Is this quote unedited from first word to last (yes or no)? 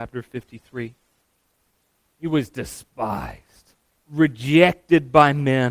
yes